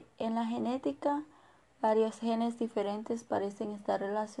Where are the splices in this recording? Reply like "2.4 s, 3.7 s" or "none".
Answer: none